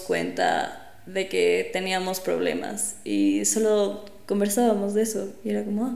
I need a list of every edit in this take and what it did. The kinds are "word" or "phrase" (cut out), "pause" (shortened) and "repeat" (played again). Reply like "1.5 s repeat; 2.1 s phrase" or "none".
none